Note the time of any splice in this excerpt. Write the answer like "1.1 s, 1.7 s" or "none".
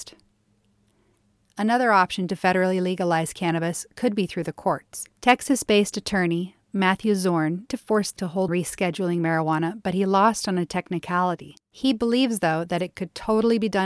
5.1 s, 7.7 s, 8.2 s, 8.5 s, 11.6 s